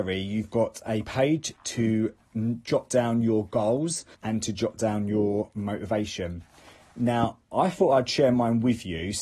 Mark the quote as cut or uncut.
cut